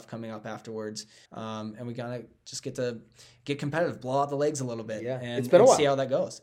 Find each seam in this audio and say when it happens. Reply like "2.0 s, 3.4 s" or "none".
1.3 s